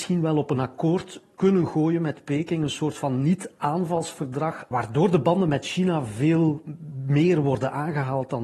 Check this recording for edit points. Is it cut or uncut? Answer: uncut